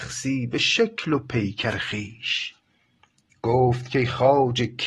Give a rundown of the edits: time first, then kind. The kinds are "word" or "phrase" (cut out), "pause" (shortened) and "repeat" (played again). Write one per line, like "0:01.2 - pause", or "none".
none